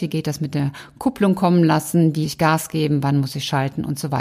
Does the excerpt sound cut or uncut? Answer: cut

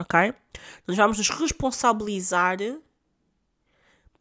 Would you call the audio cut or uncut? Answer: uncut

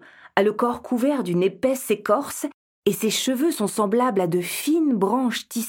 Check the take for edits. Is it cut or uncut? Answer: uncut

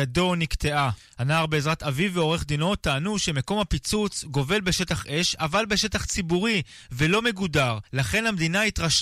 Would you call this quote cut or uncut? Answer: cut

